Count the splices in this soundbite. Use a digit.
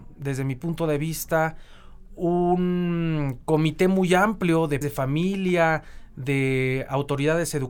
1